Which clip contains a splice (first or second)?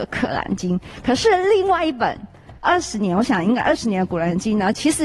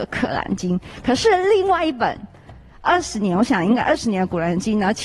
first